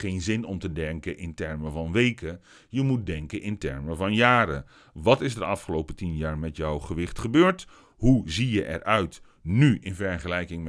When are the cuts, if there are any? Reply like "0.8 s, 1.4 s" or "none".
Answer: none